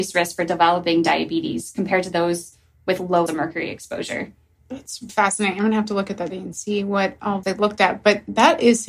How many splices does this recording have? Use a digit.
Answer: 4